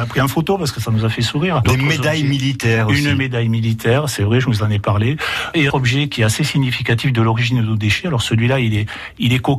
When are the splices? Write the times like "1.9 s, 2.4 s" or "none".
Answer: 5.7 s